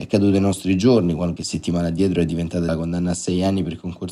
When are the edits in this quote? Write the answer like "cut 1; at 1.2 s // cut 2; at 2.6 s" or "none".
cut 1; at 1.4 s // cut 2; at 2.7 s